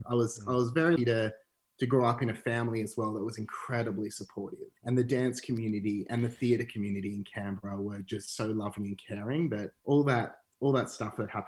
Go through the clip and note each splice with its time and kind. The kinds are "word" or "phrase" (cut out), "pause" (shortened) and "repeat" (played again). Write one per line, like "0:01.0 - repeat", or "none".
0:01.0 - word
0:04.8 - pause
0:09.8 - pause